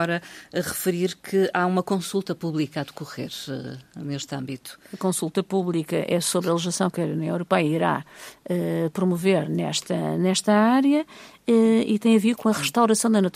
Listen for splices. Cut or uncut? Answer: uncut